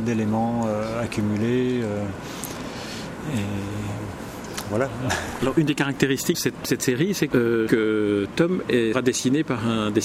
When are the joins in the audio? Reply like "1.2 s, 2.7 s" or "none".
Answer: 6.3 s, 6.6 s, 7.3 s, 7.7 s, 8.9 s